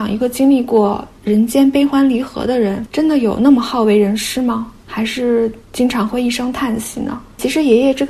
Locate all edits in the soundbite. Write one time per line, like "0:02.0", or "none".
0:05.6

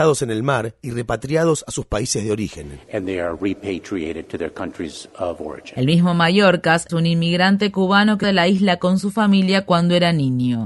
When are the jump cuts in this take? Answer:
0:06.9
0:08.2

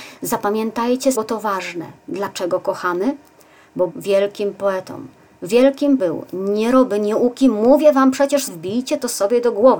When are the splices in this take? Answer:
0:01.1
0:02.0
0:03.9
0:06.0
0:08.5

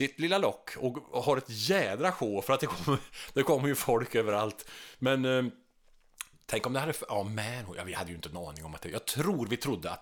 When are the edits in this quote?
none

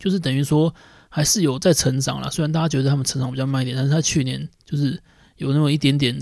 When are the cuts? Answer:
none

